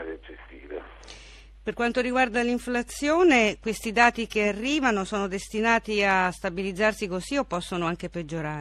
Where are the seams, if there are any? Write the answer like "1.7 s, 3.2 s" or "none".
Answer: none